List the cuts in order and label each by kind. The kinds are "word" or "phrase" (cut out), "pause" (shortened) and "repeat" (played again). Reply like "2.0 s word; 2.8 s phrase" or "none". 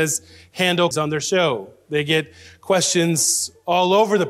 0.9 s word